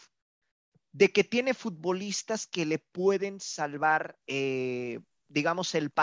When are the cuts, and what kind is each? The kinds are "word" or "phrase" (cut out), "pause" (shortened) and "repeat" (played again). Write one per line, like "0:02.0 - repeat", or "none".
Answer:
0:04.2 - pause